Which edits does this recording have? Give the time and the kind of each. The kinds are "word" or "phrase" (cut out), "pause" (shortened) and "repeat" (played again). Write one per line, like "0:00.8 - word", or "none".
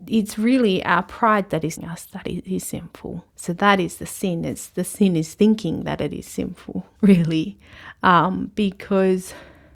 0:01.8 - word
0:03.3 - pause
0:07.0 - pause